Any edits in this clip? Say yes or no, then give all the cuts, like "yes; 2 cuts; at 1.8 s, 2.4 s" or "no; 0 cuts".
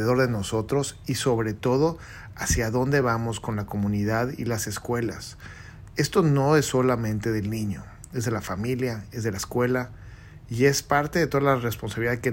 no; 0 cuts